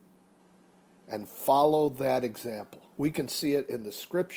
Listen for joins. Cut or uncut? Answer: cut